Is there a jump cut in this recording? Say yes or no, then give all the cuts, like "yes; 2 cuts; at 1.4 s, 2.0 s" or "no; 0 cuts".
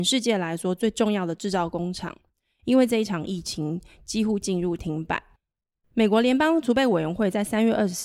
no; 0 cuts